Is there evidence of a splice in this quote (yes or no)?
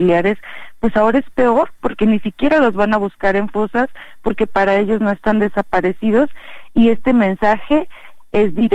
no